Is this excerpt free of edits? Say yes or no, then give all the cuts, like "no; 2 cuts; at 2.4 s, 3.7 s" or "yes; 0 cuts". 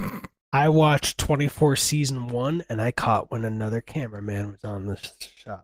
yes; 0 cuts